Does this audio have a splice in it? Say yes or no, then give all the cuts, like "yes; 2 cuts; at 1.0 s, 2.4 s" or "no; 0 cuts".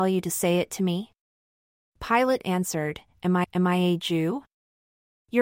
yes; 1 cut; at 3.4 s